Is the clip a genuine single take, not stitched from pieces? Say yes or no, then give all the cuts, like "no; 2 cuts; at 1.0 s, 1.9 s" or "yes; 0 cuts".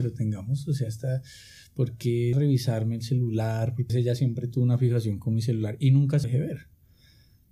no; 3 cuts; at 2.3 s, 3.9 s, 6.2 s